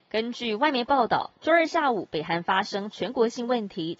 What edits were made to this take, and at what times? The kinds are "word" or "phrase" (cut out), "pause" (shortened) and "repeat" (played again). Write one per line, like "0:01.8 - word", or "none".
0:01.3 - pause